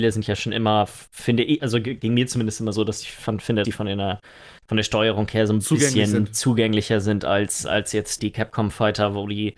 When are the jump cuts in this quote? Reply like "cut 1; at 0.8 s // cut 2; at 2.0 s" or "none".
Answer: cut 1; at 3.6 s // cut 2; at 8.2 s